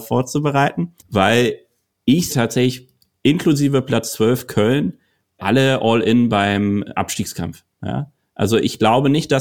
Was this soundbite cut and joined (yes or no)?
yes